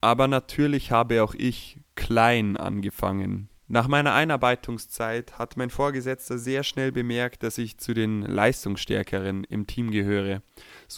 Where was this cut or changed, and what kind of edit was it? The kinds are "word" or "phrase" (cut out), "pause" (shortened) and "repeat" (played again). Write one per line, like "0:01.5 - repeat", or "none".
0:03.6 - pause

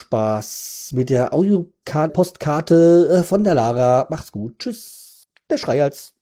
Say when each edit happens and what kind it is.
0:02.1 - word

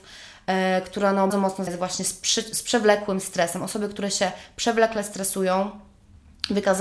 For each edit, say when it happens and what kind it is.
0:01.3 - word
0:01.7 - word

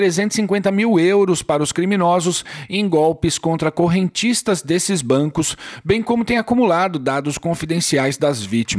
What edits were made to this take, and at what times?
none

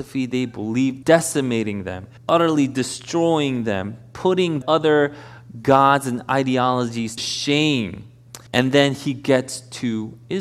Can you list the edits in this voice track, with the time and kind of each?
0:01.0 - phrase
0:02.2 - pause
0:04.6 - word
0:07.2 - word
0:08.5 - pause

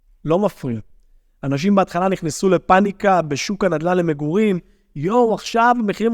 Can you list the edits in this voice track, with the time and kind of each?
none

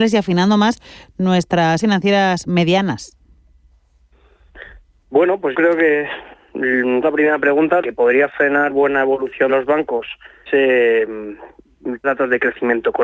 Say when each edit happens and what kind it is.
0:01.8 - word
0:05.5 - word
0:07.0 - word
0:07.8 - word
0:08.7 - word
0:09.5 - word
0:10.5 - word
0:12.0 - word

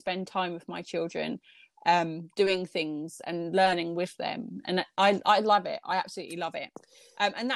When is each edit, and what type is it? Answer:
none

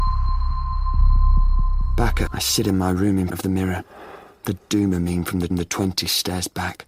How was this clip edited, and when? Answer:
0:02.3 - word
0:03.3 - word
0:05.5 - repeat

